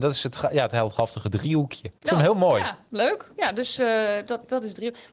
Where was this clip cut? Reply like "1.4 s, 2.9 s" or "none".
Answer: 2.0 s